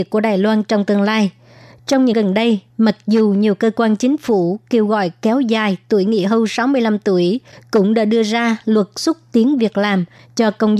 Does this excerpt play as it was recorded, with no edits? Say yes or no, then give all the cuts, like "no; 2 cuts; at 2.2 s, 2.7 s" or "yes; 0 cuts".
no; 1 cut; at 2.1 s